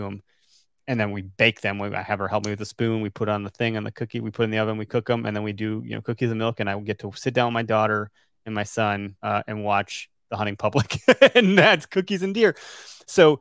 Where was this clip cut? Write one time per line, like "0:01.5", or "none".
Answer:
0:09.2